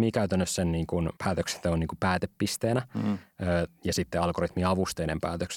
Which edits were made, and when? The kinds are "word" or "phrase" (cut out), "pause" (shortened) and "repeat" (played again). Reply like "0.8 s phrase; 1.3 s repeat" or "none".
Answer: 1.2 s pause